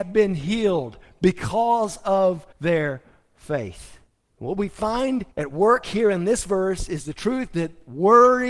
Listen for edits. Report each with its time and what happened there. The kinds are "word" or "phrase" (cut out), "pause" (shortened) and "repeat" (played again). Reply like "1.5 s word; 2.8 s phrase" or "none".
2.5 s pause; 4.1 s pause; 5.3 s pause